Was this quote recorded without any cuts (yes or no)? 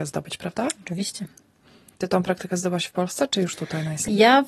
yes